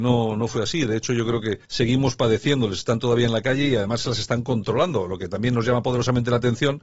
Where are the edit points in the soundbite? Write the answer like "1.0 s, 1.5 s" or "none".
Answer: 1.6 s